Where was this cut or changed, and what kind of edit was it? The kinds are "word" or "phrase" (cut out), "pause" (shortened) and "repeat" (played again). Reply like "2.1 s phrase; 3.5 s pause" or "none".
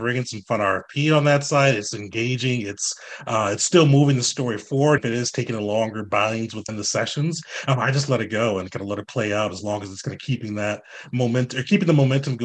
5.0 s word; 6.7 s word

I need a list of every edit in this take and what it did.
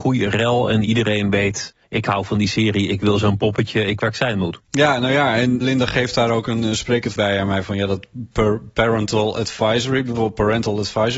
1.8 s pause; 4.0 s word; 4.6 s pause; 5.6 s word; 7.2 s word; 7.6 s word

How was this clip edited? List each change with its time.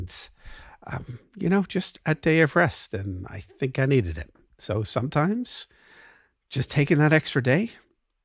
none

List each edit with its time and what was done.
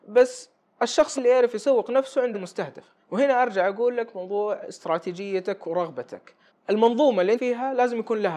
1.2 s word; 2.3 s word; 3.0 s pause; 6.5 s pause; 7.4 s phrase

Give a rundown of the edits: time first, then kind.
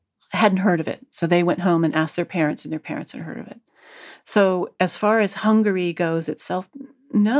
none

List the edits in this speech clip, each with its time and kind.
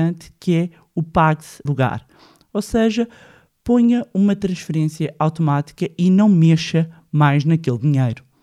1.7 s phrase

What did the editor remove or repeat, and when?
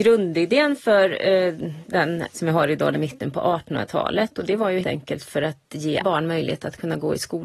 2.3 s word; 2.9 s phrase; 4.8 s word; 6.0 s word

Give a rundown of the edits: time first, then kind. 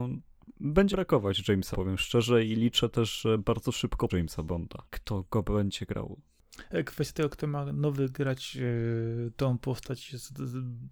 0.9 s word; 1.7 s word; 4.1 s phrase; 4.9 s pause

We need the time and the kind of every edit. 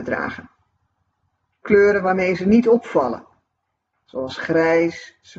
none

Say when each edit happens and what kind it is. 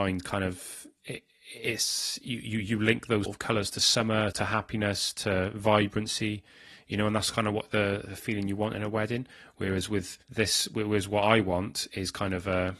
1.0 s pause; 3.2 s word; 4.3 s word; 10.2 s pause

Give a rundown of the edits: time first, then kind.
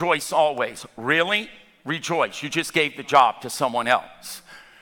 none

